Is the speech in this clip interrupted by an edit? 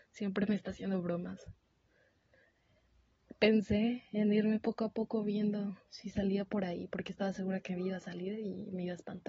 yes; 1 cut; at 5.8 s

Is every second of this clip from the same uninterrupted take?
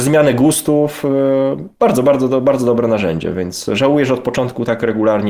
yes; 0 cuts

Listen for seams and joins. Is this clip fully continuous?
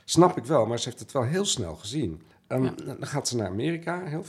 no; 1 cut; at 2.3 s

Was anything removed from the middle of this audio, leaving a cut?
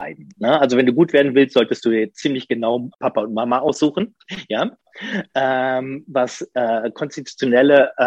yes; 1 cut; at 2.9 s

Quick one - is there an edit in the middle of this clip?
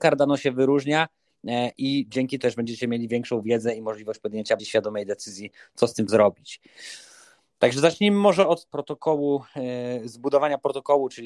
yes; 4 cuts; at 2.4 s, 4.6 s, 6.1 s, 8.7 s

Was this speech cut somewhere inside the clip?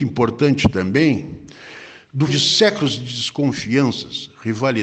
yes; 1 cut; at 2.3 s

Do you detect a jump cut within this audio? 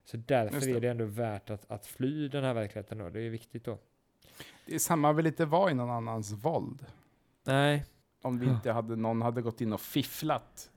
no; 0 cuts

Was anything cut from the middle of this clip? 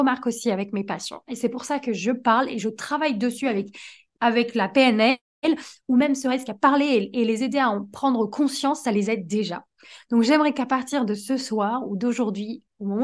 no; 0 cuts

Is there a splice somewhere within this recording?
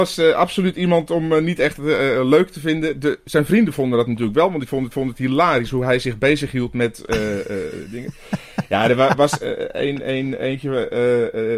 yes; 1 cut; at 4.9 s

